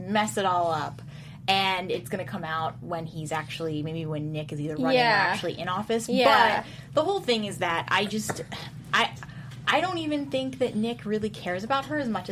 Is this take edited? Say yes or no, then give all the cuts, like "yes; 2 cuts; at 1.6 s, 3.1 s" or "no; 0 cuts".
no; 0 cuts